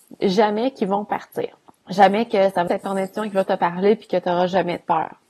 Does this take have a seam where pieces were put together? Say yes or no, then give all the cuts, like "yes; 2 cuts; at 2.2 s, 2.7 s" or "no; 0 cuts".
yes; 3 cuts; at 1.7 s, 2.7 s, 3.5 s